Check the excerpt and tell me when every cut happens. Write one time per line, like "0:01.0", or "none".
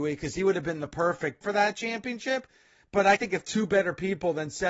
0:01.4
0:03.2